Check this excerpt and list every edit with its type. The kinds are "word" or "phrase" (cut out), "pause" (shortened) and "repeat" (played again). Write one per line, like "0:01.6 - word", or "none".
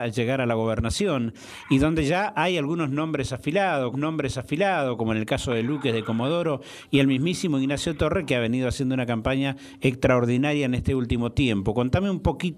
0:03.9 - repeat